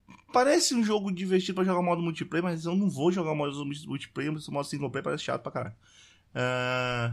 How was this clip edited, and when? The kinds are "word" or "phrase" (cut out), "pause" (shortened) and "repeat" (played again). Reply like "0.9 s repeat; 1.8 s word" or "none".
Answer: none